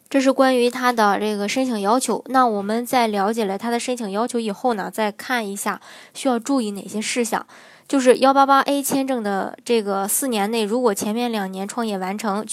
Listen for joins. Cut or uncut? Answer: uncut